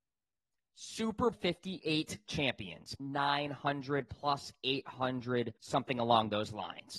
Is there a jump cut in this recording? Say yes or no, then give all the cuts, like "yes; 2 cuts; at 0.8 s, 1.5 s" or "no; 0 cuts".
yes; 3 cuts; at 1.3 s, 3.0 s, 5.6 s